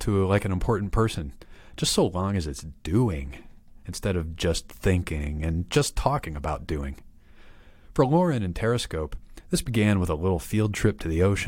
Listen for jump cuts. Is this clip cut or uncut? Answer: uncut